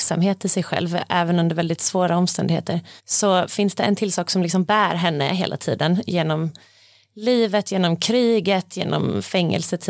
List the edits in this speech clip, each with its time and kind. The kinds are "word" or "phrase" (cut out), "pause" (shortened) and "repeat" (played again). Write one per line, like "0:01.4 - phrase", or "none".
0:03.0 - pause